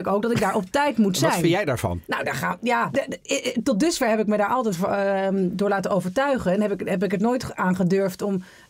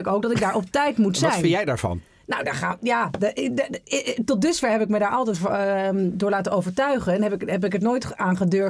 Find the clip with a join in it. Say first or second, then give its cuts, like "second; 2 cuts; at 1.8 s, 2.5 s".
first; 2 cuts; at 2.0 s, 2.9 s